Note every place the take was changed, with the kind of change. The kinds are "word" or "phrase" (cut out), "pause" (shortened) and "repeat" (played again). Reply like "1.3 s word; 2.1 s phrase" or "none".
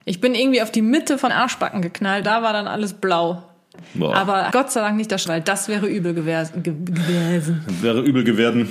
1.3 s word; 2.2 s word; 4.5 s word; 5.3 s word

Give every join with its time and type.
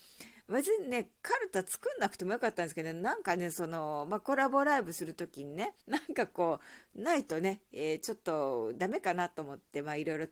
5.8 s pause

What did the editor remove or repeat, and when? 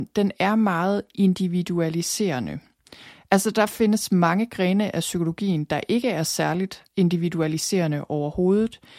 6.9 s pause

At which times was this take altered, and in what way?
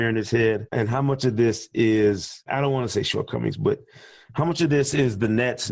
2.5 s word

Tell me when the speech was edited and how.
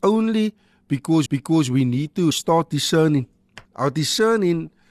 1.3 s repeat; 2.3 s word; 3.6 s pause

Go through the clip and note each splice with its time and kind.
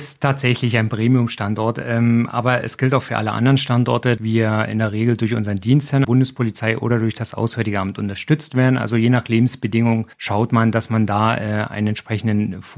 4.2 s word; 6.0 s word; 10.1 s pause

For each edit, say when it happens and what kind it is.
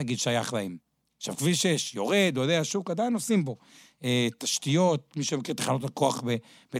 none

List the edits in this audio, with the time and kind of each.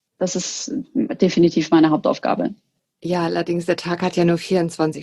none

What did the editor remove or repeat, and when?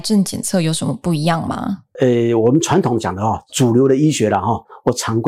3.5 s word

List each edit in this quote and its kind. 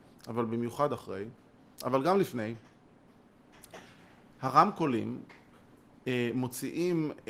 none

